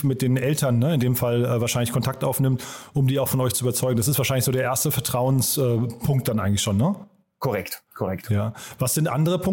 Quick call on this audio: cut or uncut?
uncut